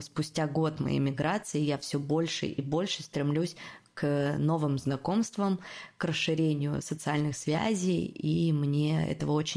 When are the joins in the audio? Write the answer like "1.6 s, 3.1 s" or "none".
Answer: none